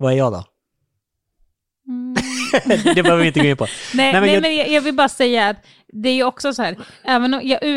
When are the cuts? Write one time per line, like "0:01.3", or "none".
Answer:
none